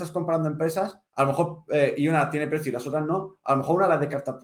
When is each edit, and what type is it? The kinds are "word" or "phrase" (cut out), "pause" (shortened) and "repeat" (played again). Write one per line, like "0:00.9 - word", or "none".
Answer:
0:01.1 - pause